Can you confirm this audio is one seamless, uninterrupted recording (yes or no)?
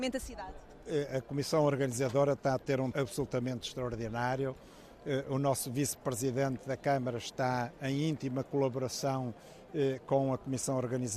no